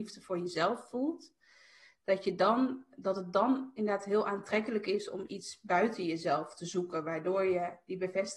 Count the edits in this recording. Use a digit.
0